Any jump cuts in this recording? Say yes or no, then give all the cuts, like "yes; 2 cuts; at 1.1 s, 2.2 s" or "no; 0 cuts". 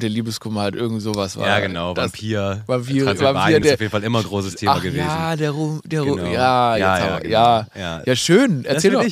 no; 0 cuts